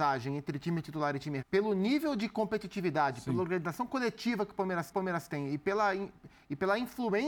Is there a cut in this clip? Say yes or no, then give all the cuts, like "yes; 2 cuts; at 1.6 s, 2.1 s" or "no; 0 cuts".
yes; 2 cuts; at 1.4 s, 4.9 s